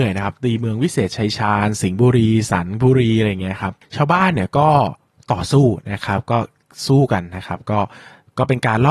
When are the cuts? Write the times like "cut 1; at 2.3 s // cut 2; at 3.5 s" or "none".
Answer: none